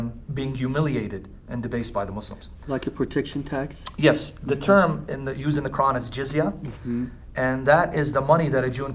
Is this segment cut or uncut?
uncut